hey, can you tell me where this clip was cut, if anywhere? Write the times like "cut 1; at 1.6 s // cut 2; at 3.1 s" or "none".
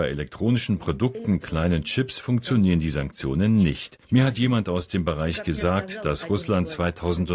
cut 1; at 4.0 s